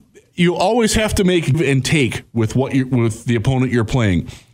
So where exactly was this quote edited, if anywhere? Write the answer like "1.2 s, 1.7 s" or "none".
1.5 s